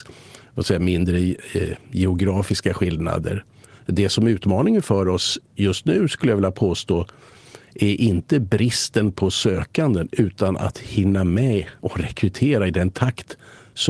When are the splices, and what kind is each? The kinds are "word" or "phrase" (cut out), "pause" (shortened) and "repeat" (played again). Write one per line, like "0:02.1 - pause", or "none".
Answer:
none